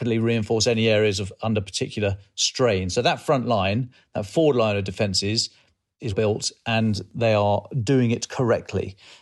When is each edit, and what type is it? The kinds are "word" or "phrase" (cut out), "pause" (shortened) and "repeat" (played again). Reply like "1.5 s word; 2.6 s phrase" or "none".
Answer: 6.1 s word

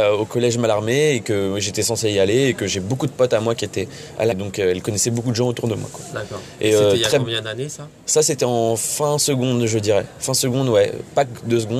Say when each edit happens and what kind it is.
4.3 s phrase

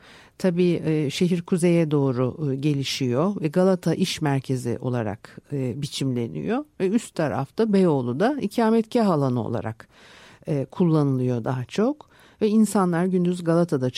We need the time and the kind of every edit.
none

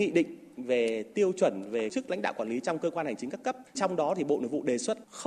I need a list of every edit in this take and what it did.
1.9 s word

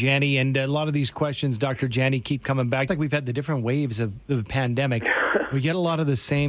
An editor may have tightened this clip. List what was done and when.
2.9 s word

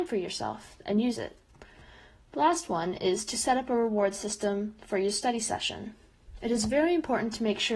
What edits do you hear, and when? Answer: none

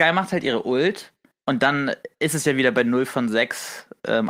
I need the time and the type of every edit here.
none

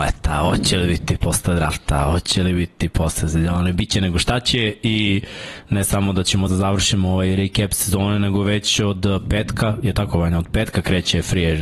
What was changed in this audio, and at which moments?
6.5 s word

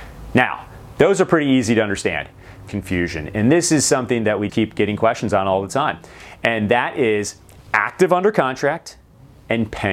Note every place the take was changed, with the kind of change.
2.7 s phrase; 4.5 s word

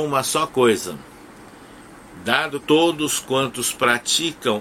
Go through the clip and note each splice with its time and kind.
2.6 s word

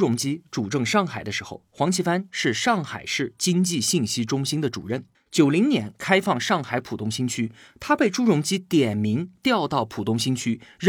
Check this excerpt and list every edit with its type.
5.1 s pause

